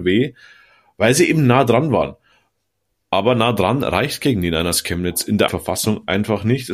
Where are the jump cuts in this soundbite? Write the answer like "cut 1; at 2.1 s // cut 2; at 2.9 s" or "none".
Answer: cut 1; at 5.5 s